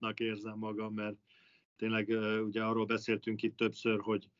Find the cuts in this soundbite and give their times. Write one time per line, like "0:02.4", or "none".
none